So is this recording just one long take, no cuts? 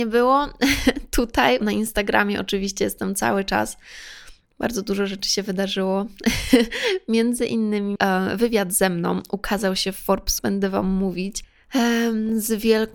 no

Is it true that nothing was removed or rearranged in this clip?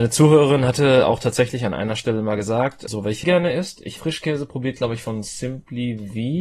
no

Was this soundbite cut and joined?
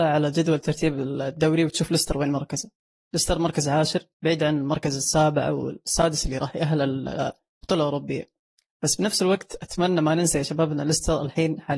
yes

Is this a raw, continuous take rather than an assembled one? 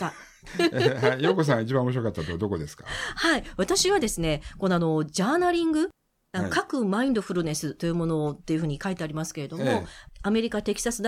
yes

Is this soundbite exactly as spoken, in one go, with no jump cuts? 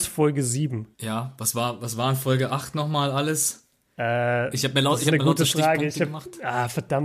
no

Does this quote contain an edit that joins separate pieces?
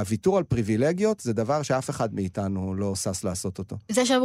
no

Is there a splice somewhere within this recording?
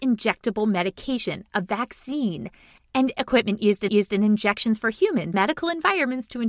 yes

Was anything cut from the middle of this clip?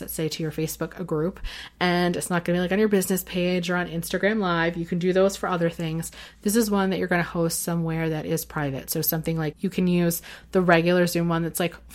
yes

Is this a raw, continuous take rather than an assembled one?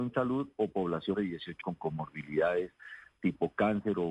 no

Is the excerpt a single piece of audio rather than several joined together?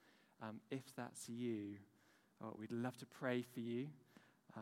no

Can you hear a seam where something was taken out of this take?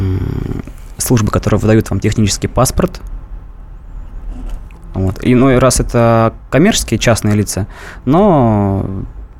no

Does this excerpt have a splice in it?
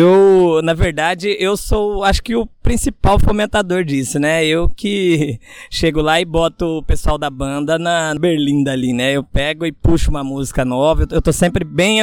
no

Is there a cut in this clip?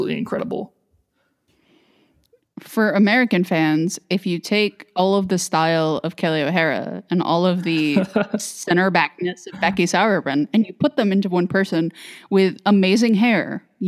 no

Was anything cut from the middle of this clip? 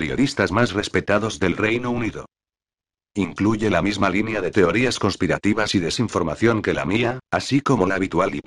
no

